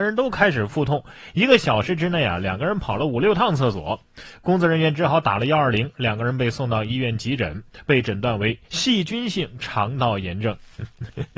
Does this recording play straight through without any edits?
no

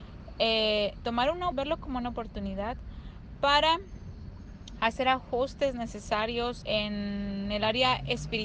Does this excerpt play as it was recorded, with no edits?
no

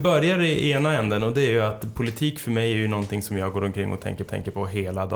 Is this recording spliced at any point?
yes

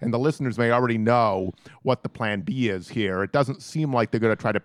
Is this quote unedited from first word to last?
yes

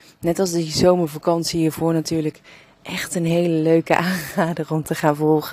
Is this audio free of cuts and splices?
yes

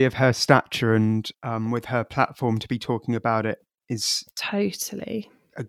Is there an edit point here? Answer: yes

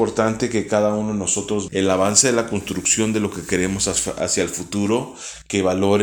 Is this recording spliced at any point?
yes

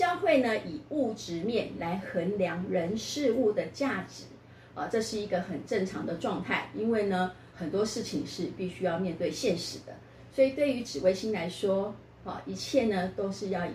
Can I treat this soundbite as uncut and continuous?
no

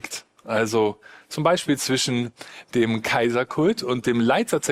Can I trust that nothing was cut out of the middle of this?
yes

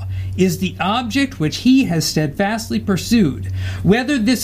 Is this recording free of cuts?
yes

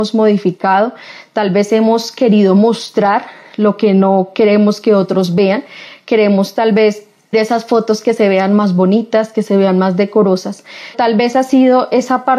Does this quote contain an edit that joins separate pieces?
yes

